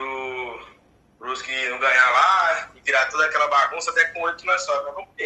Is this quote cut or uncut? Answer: uncut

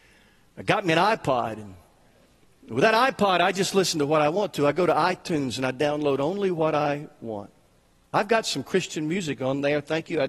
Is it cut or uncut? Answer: uncut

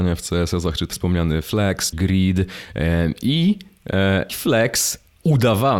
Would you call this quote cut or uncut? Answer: cut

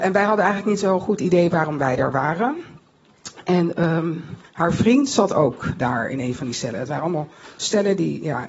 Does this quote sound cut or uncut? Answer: cut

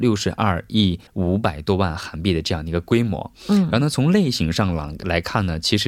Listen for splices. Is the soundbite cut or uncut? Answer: cut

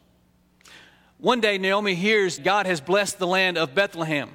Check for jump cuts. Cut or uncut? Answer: cut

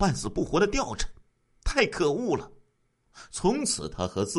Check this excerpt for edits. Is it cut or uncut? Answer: uncut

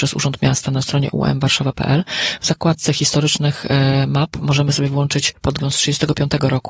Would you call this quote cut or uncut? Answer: uncut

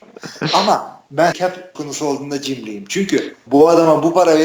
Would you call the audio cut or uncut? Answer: cut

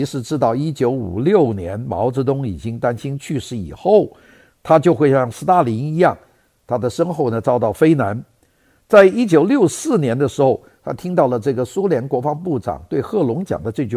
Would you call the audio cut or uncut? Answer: uncut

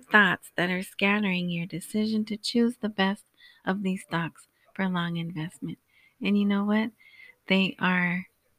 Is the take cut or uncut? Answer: uncut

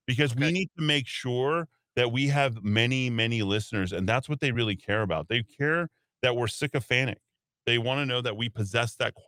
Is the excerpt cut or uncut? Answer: uncut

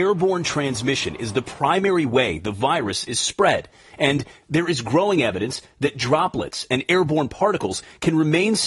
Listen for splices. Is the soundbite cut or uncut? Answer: uncut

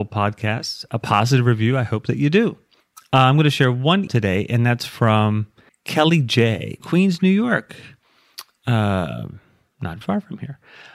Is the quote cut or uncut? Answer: cut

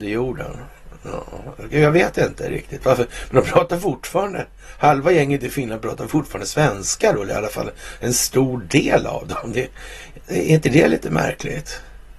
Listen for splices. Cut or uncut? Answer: uncut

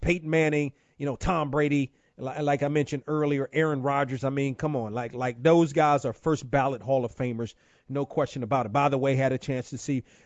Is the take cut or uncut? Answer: uncut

